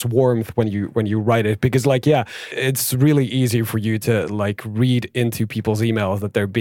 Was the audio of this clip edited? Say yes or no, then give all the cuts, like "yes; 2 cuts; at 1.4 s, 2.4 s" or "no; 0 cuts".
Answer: no; 0 cuts